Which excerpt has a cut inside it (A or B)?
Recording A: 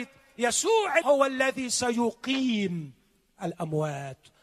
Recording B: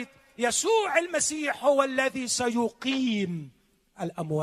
A